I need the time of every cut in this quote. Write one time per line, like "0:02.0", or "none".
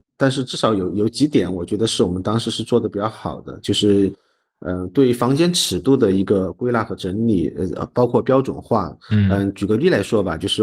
none